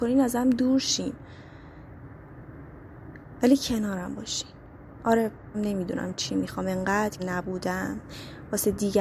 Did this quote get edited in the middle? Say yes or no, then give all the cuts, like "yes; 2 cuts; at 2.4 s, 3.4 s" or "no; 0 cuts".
yes; 2 cuts; at 5.5 s, 7.2 s